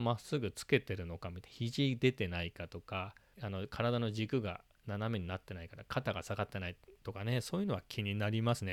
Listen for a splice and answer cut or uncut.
cut